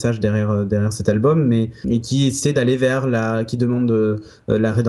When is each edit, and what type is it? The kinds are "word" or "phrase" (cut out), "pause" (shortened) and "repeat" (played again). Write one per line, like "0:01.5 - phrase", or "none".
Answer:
0:01.8 - word